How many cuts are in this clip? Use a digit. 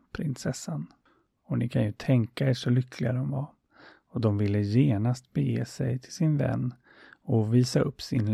0